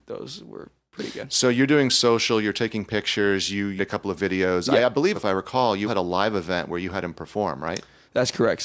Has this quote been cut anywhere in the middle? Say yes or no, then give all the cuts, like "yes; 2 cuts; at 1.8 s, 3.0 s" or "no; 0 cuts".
yes; 4 cuts; at 3.8 s, 4.2 s, 5.1 s, 5.8 s